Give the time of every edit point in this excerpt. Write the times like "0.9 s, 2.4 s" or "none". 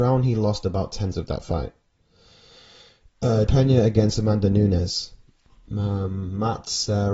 1.1 s, 3.5 s